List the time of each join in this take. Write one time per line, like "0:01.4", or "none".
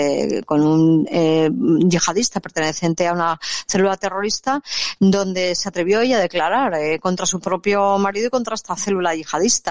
none